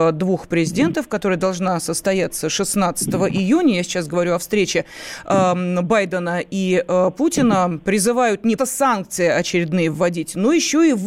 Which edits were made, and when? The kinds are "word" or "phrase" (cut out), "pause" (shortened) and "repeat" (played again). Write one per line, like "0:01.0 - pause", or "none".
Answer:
0:08.6 - word